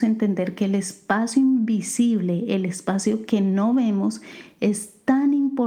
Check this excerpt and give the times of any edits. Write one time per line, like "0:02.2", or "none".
none